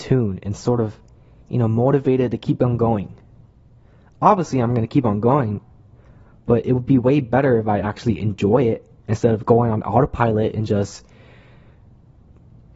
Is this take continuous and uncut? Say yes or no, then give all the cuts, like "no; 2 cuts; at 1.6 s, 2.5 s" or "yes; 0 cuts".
yes; 0 cuts